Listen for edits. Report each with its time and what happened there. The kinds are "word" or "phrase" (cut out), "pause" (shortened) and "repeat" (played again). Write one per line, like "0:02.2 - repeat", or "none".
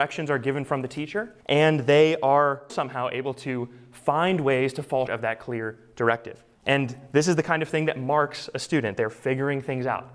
0:01.4 - pause
0:02.7 - word
0:05.1 - word
0:06.5 - pause